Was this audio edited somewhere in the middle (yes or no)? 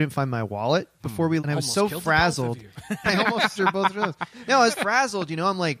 yes